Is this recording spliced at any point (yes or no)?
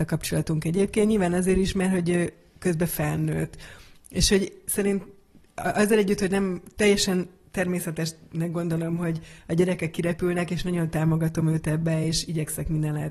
no